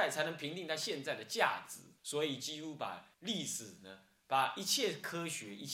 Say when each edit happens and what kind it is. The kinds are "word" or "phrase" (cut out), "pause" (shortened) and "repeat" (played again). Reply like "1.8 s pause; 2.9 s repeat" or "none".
2.0 s pause; 3.1 s pause